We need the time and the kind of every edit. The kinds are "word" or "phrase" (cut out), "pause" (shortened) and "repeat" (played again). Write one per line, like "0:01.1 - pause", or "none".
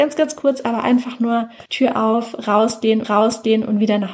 0:01.7 - pause
0:03.0 - repeat